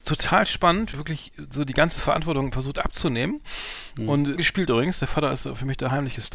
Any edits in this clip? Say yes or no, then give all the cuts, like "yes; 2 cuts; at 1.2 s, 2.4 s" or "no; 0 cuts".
yes; 2 cuts; at 0.9 s, 4.4 s